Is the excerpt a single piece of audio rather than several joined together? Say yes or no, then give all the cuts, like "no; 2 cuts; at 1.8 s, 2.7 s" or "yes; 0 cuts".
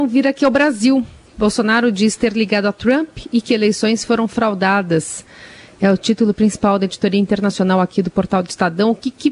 yes; 0 cuts